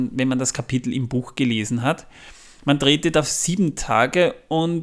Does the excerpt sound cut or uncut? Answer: uncut